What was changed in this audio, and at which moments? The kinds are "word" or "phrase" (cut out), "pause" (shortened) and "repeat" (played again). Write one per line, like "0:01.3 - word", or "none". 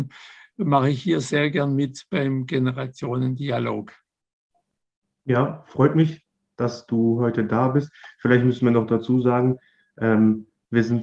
none